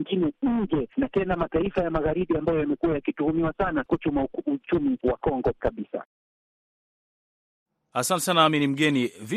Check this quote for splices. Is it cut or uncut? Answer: cut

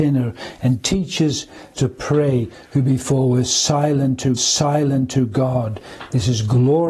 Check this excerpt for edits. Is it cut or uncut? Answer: cut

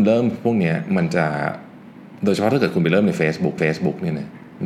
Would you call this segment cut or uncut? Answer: cut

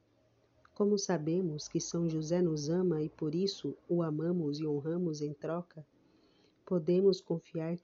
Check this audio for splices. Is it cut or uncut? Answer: uncut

